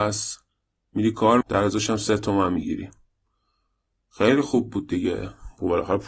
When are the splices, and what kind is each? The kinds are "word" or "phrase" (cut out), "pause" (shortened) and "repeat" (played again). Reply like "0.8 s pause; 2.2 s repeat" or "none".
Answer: 1.4 s word

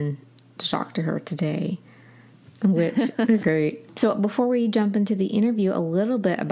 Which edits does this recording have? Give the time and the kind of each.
3.4 s word

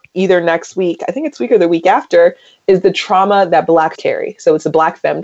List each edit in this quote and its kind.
1.3 s word; 3.9 s word

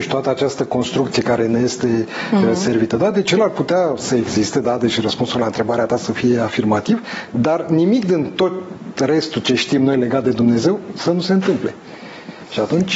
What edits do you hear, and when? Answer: none

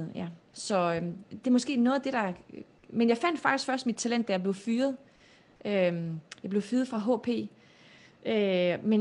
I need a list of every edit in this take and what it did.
none

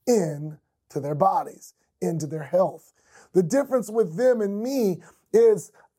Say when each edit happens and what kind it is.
none

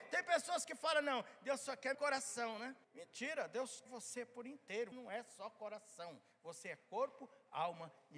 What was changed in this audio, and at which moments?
1.9 s word; 2.8 s pause; 3.8 s word; 4.9 s word

